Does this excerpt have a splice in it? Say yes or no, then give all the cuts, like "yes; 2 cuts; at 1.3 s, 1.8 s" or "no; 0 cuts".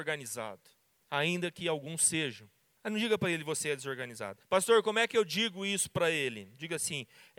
yes; 1 cut; at 4.4 s